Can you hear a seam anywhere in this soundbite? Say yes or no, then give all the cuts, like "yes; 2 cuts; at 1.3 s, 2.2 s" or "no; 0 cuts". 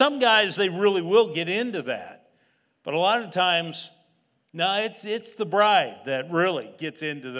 no; 0 cuts